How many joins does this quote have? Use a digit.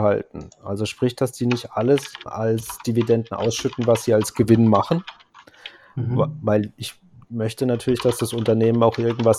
1